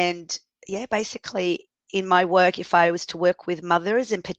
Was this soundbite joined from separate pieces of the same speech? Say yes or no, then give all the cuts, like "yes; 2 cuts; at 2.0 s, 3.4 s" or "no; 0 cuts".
no; 0 cuts